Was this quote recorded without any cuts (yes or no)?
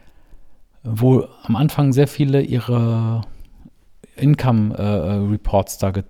yes